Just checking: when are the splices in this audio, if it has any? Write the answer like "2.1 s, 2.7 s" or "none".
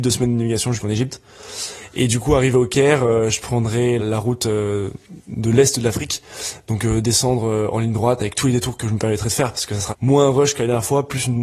4.0 s, 9.9 s